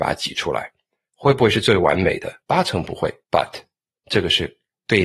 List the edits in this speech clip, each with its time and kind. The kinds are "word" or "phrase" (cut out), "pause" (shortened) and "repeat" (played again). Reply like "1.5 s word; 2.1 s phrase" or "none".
2.4 s pause; 3.2 s pause